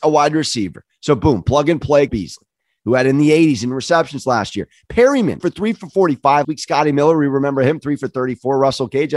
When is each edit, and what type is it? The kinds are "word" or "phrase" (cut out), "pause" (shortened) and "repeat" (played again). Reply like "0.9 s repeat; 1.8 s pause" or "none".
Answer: 2.1 s word; 5.4 s word; 6.4 s word